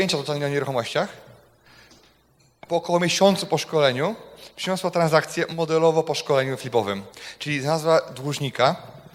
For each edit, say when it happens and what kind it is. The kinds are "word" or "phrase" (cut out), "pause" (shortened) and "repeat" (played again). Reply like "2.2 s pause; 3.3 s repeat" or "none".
none